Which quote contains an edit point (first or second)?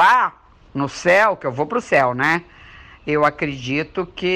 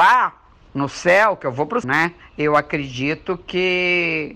second